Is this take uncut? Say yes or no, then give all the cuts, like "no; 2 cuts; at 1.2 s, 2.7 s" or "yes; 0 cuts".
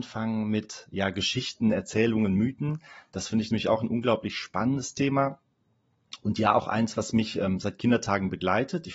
yes; 0 cuts